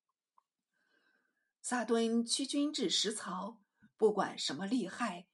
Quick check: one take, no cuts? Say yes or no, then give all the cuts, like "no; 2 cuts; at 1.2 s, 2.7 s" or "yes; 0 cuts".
yes; 0 cuts